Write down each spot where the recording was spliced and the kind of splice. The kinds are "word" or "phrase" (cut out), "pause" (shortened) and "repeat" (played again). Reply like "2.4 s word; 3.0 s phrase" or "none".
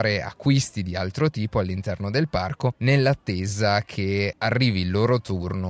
none